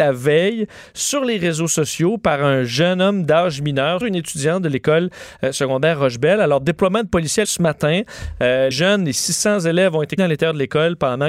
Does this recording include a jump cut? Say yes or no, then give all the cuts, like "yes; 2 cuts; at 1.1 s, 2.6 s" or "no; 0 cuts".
yes; 4 cuts; at 4.0 s, 7.4 s, 8.7 s, 10.2 s